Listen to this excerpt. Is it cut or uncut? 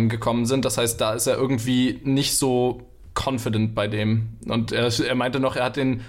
uncut